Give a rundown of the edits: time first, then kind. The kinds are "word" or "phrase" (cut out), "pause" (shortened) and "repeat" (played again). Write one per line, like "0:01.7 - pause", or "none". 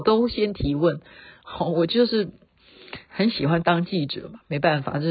none